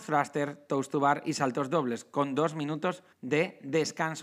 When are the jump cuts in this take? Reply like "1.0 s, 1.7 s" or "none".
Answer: 3.1 s